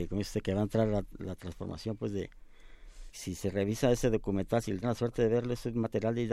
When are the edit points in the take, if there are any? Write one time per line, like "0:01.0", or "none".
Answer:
0:03.1
0:04.8

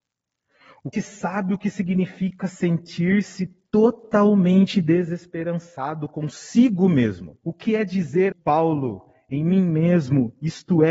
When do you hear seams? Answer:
0:00.9
0:07.4
0:08.3

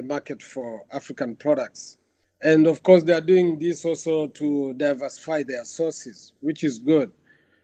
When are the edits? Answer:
none

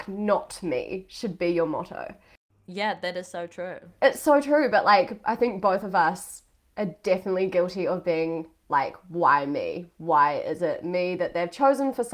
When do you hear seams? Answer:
none

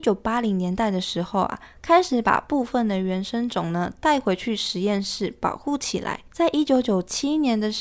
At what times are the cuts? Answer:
0:06.3

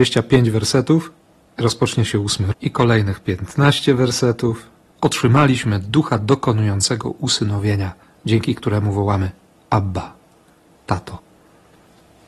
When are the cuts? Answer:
0:02.5
0:04.9

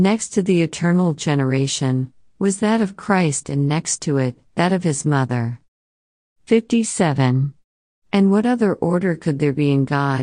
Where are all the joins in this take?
0:04.5

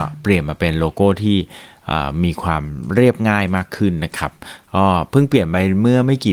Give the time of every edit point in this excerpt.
none

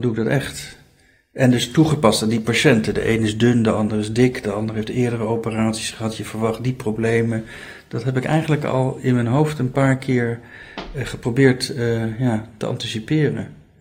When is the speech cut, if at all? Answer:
none

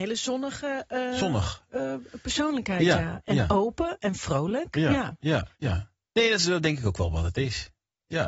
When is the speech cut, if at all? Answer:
0:05.5

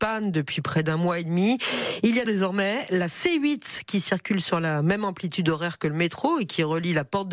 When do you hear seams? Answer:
0:02.3

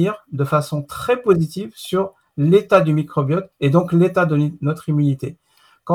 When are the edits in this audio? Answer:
0:03.5

